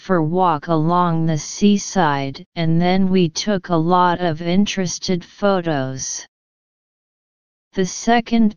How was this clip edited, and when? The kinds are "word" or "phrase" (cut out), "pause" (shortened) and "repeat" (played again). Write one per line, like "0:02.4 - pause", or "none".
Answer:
0:02.5 - pause